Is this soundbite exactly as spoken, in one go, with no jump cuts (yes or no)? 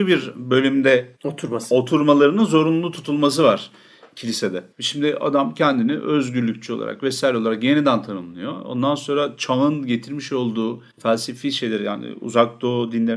no